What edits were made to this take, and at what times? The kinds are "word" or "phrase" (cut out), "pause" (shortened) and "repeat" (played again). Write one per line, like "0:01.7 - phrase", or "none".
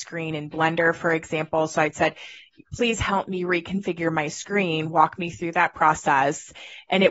none